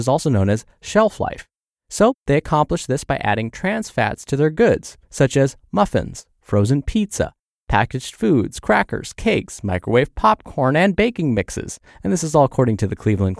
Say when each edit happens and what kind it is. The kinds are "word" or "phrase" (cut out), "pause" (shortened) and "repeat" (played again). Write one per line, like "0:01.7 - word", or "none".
none